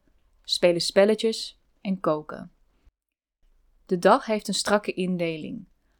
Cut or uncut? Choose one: uncut